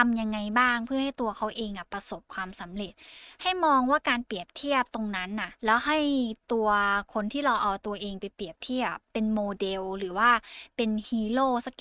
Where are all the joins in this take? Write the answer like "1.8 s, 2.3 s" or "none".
5.6 s, 9.0 s